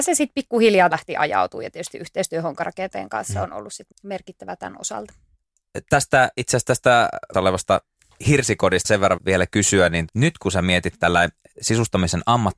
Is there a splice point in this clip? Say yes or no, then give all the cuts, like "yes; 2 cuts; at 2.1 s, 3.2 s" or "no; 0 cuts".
yes; 6 cuts; at 0.9 s, 3.9 s, 7.3 s, 8.8 s, 9.2 s, 10.1 s